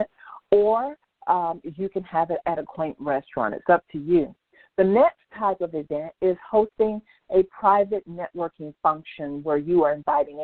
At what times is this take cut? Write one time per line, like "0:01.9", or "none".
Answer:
none